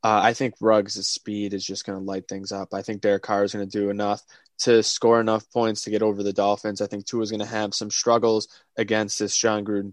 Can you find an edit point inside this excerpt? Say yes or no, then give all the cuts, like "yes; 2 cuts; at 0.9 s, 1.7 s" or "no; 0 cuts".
no; 0 cuts